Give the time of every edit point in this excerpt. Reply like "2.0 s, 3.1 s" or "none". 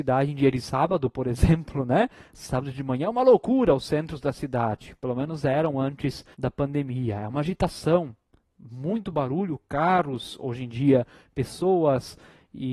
6.3 s